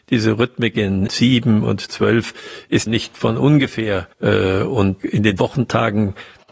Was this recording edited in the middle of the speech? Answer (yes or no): yes